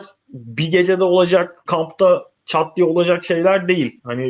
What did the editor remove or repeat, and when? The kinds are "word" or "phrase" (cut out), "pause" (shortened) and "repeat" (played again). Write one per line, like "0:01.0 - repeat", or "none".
0:01.7 - word